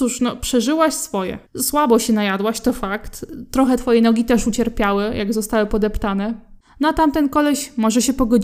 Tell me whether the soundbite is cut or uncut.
cut